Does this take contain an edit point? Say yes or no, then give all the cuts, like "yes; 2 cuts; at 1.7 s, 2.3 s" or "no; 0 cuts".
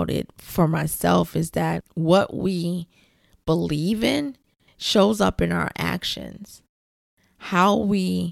no; 0 cuts